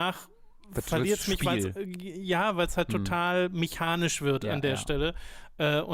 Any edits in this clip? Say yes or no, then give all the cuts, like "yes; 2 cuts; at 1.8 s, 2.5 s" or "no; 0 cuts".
no; 0 cuts